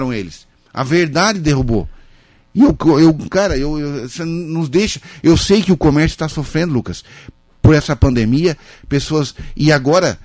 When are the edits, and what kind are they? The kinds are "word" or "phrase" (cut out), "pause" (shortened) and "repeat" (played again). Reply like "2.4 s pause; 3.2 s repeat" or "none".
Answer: none